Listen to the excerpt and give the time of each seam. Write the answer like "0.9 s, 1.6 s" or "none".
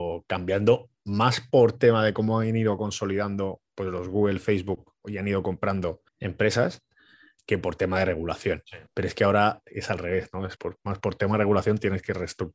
3.7 s, 6.1 s, 8.9 s, 10.6 s